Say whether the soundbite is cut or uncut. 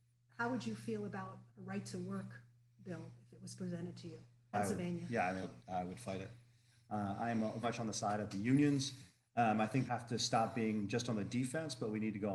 cut